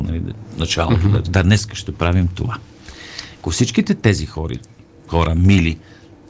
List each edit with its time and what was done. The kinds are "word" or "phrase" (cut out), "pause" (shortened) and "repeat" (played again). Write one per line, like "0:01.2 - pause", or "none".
0:01.3 - word
0:03.4 - word